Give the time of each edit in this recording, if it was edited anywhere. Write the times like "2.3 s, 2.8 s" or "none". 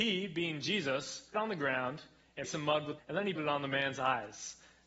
1.3 s, 2.4 s, 3.0 s, 3.4 s